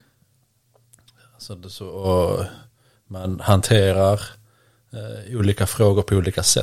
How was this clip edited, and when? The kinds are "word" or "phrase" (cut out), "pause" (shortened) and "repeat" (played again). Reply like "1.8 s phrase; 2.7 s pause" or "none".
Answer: none